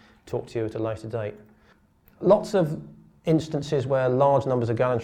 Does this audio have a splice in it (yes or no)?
no